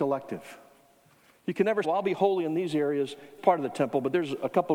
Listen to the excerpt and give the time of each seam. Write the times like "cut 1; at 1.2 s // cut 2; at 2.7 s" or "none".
cut 1; at 1.8 s // cut 2; at 3.4 s

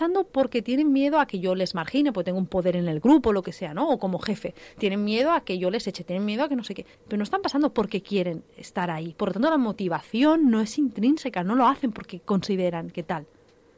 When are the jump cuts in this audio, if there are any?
cut 1; at 6.9 s

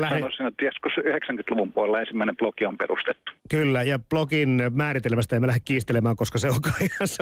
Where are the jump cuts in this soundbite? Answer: cut 1; at 3.4 s

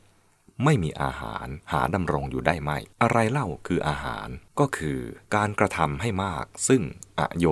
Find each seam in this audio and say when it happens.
cut 1; at 1.6 s // cut 2; at 2.9 s // cut 3; at 4.5 s // cut 4; at 5.2 s

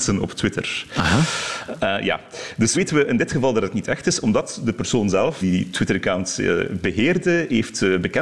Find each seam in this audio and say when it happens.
cut 1; at 2.7 s // cut 2; at 5.4 s

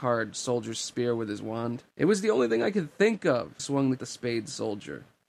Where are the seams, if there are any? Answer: cut 1; at 1.9 s // cut 2; at 3.6 s // cut 3; at 4.0 s

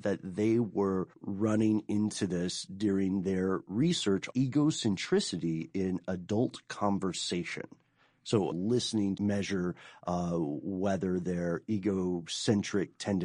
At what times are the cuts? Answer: cut 1; at 1.1 s // cut 2; at 4.3 s // cut 3; at 8.5 s // cut 4; at 9.2 s

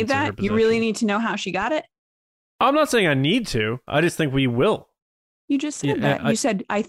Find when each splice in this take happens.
none

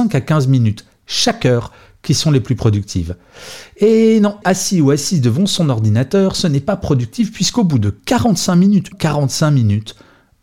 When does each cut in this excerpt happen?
cut 1; at 4.4 s // cut 2; at 8.9 s

